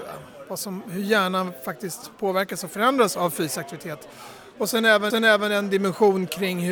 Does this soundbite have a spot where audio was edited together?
yes; 1 cut; at 5.1 s

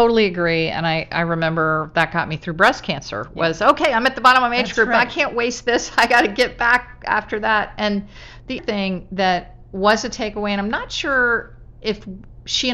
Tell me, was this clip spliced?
yes; 1 cut; at 8.6 s

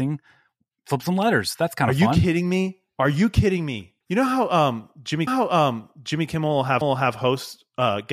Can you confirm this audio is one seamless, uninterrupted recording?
no; 3 cuts; at 4.0 s, 5.3 s, 6.8 s

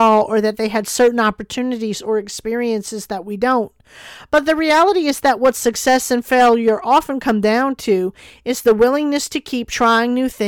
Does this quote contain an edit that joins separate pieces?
no; 0 cuts

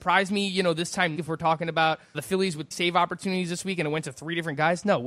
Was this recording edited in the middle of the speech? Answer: yes; 3 cuts; at 1.2 s, 2.1 s, 2.7 s

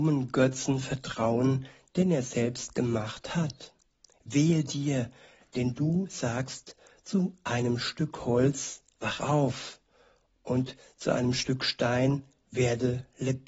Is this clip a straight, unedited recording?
yes; 0 cuts

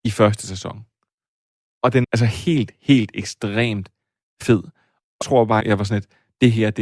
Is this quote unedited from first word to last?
no; 3 cuts; at 2.0 s, 5.2 s, 5.6 s

